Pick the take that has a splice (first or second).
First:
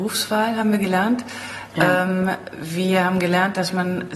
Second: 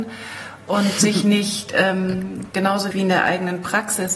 second